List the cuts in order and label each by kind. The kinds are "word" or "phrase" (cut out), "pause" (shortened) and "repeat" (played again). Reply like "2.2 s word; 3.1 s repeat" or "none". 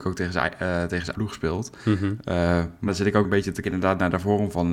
1.1 s word; 2.9 s word; 3.2 s word; 3.6 s word

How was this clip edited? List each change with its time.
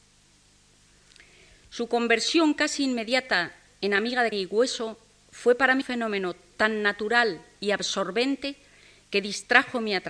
4.3 s word; 5.8 s word

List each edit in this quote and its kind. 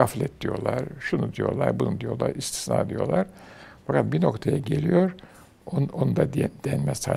none

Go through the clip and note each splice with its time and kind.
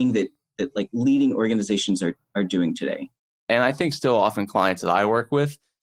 none

